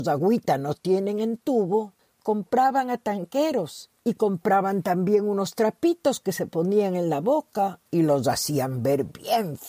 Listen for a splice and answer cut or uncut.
cut